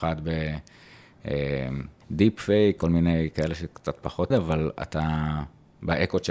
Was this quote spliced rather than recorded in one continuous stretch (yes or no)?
yes